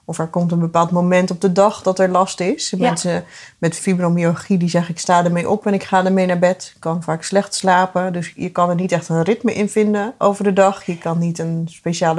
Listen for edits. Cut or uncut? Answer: uncut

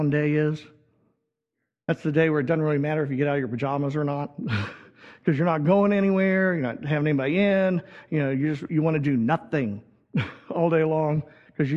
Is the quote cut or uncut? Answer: uncut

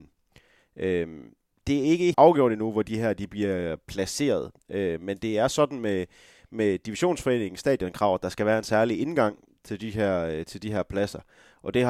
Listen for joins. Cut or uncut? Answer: cut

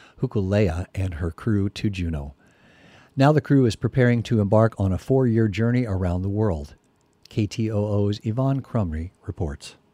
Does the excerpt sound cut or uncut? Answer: uncut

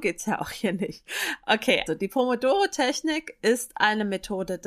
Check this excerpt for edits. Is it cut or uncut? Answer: cut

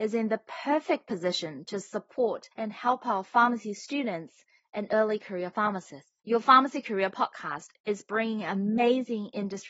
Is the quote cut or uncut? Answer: cut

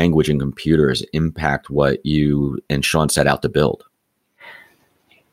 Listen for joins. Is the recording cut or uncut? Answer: uncut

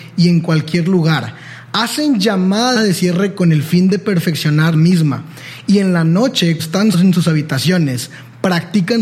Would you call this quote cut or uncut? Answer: cut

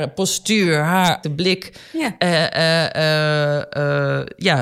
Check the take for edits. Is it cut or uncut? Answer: cut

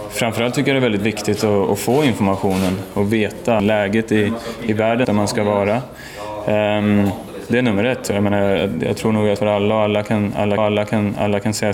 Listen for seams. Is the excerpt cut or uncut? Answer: cut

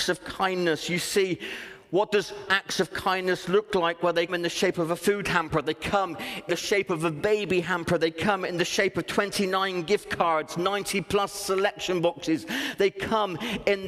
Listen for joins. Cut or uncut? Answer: cut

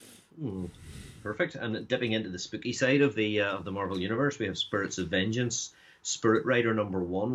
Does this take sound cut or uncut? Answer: uncut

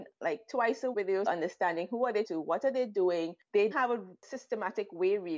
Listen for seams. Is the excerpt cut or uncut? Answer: cut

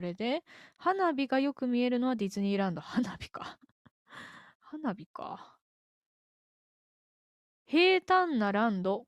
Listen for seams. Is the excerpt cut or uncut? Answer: uncut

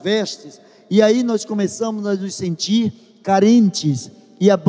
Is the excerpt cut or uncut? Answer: uncut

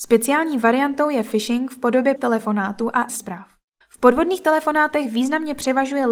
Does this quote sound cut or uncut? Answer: cut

